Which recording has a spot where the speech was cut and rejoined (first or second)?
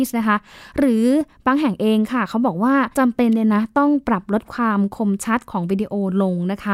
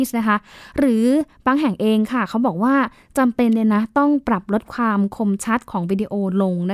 first